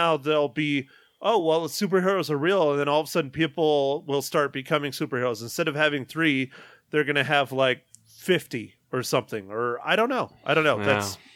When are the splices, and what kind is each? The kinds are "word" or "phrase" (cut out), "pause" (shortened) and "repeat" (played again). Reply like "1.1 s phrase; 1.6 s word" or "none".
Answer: none